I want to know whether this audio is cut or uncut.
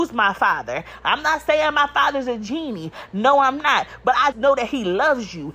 cut